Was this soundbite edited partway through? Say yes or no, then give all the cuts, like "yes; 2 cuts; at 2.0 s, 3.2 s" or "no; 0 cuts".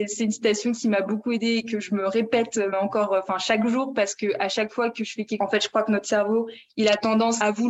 yes; 2 cuts; at 2.7 s, 5.4 s